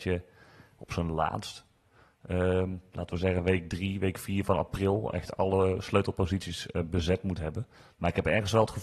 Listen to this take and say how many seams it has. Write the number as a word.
zero